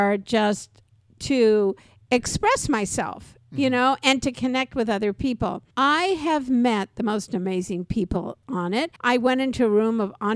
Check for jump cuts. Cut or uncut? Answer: cut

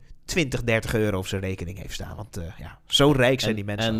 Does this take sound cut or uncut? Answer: uncut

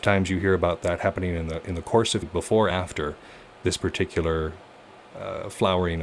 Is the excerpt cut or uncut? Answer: cut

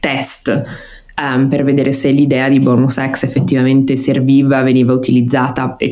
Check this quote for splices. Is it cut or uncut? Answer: uncut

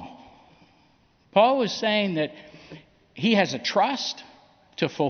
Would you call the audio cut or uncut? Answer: uncut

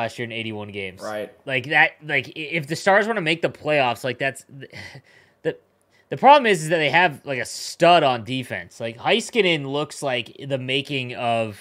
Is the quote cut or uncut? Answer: uncut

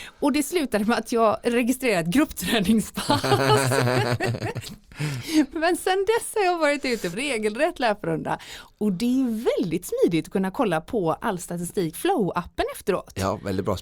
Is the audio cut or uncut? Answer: cut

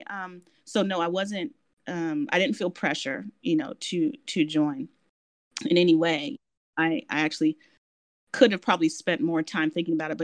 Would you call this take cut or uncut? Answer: uncut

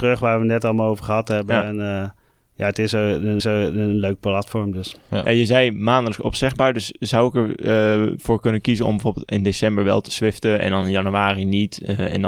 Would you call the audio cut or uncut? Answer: cut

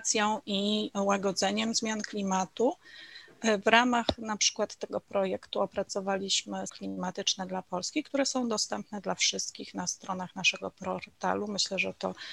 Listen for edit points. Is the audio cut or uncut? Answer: cut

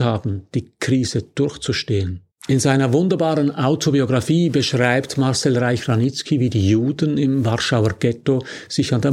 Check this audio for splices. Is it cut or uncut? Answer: cut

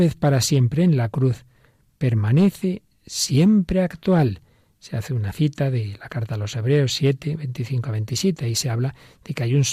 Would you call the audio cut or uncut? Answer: uncut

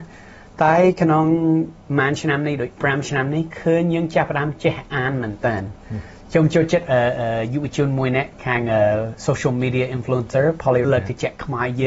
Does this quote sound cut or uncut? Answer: cut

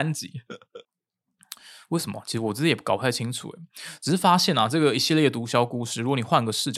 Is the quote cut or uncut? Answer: uncut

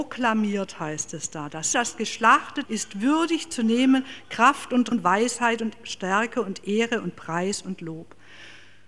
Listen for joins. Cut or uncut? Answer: cut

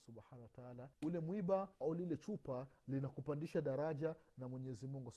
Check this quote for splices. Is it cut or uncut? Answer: cut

